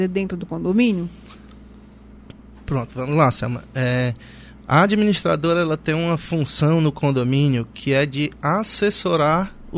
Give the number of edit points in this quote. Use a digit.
0